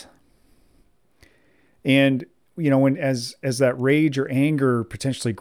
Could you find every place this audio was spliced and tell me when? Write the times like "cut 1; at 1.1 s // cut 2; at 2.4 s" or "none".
none